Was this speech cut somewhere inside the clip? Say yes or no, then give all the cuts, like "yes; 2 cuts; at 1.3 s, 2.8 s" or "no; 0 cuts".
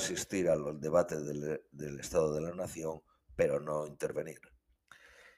no; 0 cuts